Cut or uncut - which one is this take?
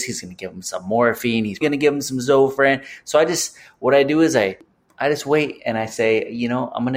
cut